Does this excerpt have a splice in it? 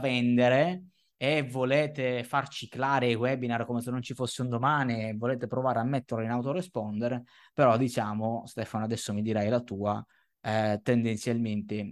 no; 0 cuts

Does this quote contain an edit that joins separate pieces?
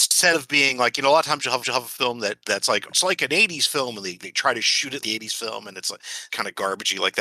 yes; 4 cuts; at 1.6 s, 2.9 s, 5.0 s, 6.3 s

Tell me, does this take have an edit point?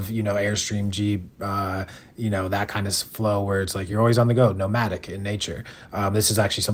no; 0 cuts

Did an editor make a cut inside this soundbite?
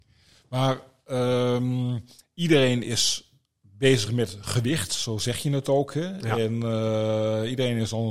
no; 0 cuts

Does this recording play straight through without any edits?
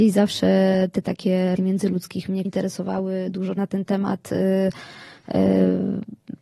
no; 4 cuts; at 1.0 s, 1.6 s, 2.4 s, 3.6 s

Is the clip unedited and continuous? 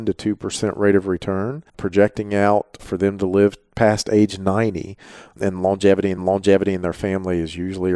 no; 2 cuts; at 1.7 s, 6.2 s

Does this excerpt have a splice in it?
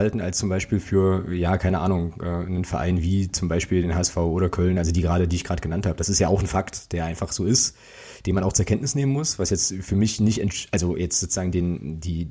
no; 0 cuts

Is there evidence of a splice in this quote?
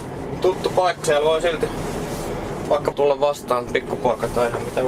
yes; 3 cuts; at 1.0 s, 2.9 s, 3.7 s

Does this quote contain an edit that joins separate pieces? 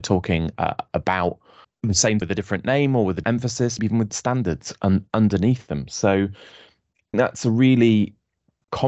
yes; 6 cuts; at 1.6 s, 2.2 s, 3.2 s, 3.8 s, 4.1 s, 7.1 s

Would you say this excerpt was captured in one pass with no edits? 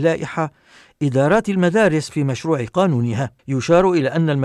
no; 1 cut; at 3.4 s

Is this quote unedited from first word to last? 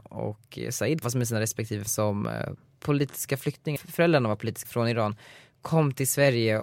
no; 4 cuts; at 1.0 s, 1.9 s, 3.8 s, 4.6 s

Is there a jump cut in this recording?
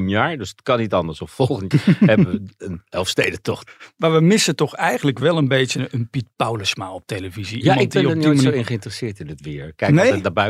yes; 1 cut; at 1.7 s

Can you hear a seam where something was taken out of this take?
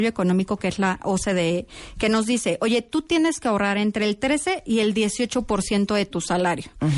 no; 0 cuts

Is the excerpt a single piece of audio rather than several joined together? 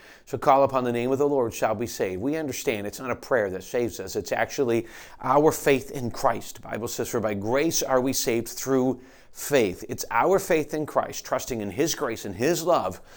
yes; 0 cuts

